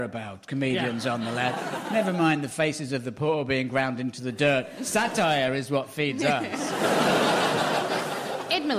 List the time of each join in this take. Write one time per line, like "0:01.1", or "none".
none